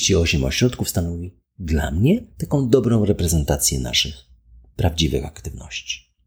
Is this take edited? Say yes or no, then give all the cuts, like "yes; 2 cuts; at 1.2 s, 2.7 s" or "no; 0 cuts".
no; 0 cuts